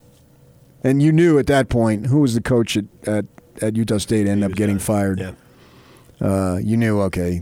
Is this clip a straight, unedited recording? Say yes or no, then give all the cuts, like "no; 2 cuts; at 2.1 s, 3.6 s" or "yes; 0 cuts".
yes; 0 cuts